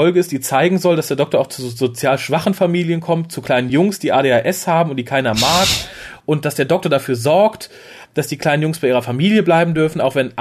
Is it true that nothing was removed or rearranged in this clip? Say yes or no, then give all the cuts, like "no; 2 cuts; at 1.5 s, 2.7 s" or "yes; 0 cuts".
yes; 0 cuts